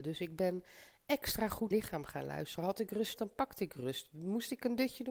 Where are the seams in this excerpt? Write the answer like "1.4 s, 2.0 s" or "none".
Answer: 1.7 s, 3.2 s